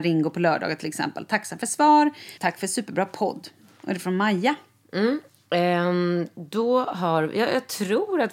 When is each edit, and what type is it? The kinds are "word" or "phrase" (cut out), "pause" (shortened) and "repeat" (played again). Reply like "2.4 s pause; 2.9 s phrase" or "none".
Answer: 2.4 s word